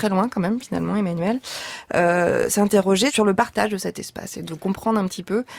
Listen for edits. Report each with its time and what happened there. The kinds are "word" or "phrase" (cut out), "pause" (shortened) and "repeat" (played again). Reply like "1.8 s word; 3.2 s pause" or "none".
none